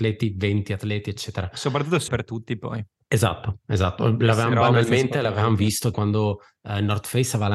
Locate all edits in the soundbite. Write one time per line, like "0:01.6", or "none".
0:02.1
0:05.9